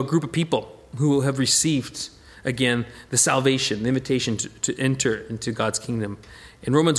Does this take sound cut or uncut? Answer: uncut